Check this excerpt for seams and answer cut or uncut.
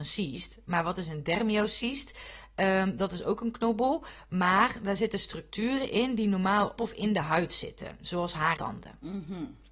cut